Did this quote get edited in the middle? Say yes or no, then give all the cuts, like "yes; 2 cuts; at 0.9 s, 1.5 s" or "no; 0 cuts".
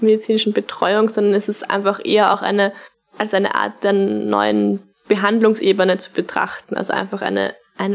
no; 0 cuts